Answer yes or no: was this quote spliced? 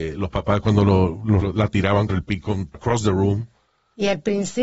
yes